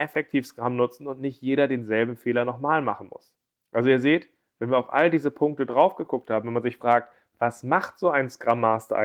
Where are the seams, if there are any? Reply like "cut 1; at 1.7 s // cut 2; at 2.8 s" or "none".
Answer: none